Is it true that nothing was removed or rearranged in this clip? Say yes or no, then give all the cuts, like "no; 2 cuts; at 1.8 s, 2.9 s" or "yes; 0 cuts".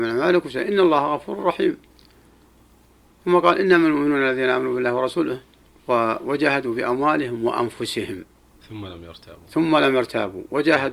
no; 1 cut; at 5.7 s